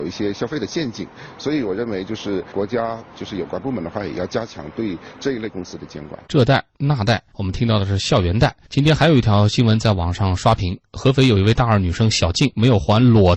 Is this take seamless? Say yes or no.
no